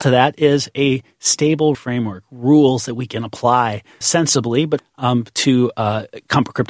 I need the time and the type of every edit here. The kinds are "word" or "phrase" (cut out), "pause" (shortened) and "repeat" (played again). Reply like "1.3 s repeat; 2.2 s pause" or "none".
1.7 s word; 4.0 s word; 4.8 s word